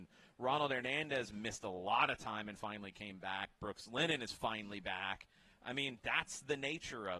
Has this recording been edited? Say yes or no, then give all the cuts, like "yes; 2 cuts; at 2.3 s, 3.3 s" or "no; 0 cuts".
no; 0 cuts